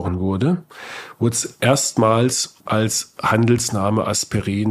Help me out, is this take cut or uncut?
cut